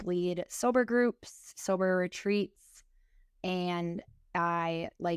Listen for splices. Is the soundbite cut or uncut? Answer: uncut